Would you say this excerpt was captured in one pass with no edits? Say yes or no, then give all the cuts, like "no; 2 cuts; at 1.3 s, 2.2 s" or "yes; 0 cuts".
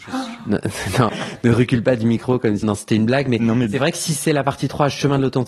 no; 2 cuts; at 1.1 s, 2.6 s